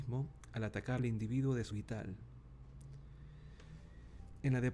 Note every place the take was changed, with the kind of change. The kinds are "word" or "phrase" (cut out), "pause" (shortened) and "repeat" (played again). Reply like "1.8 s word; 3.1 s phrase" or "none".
1.0 s phrase; 1.7 s word